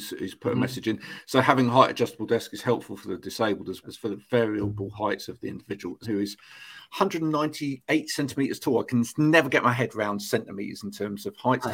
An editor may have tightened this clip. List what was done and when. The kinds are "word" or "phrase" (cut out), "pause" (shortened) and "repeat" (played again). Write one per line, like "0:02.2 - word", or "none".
0:03.8 - word
0:06.0 - word